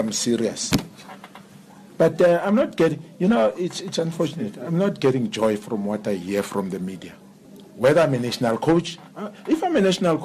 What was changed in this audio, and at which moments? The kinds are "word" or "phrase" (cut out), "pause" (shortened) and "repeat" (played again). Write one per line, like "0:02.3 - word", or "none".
none